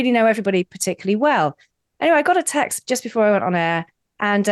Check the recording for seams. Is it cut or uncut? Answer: uncut